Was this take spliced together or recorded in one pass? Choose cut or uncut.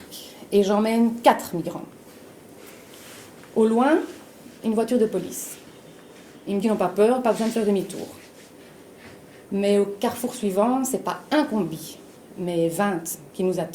cut